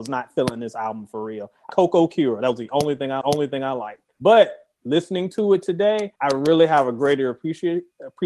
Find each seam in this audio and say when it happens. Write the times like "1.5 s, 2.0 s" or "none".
1.7 s, 3.2 s, 6.2 s

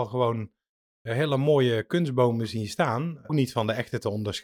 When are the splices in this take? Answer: 3.3 s

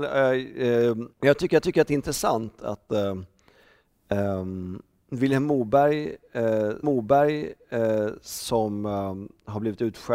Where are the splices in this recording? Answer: 1.1 s, 1.6 s, 6.8 s

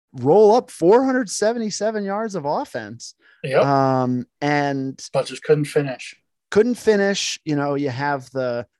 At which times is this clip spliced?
none

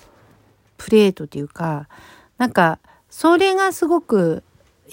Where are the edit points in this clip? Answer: none

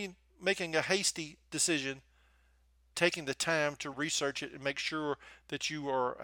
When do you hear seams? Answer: 2.9 s, 3.9 s

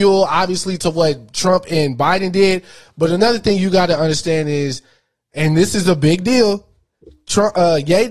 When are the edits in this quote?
none

